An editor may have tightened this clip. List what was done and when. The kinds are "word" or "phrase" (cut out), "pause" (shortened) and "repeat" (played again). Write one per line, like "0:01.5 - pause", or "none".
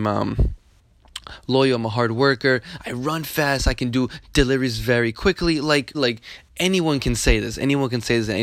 0:05.9 - word